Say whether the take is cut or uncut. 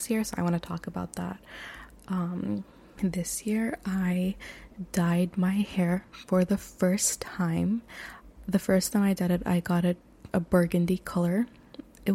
cut